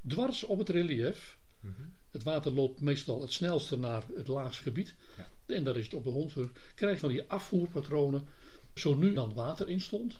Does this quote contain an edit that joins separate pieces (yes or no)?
yes